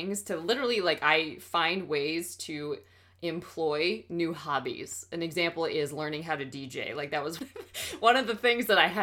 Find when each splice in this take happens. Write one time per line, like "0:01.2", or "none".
0:07.4